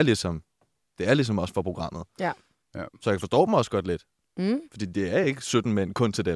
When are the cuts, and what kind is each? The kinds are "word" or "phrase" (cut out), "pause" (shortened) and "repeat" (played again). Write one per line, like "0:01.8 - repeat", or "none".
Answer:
none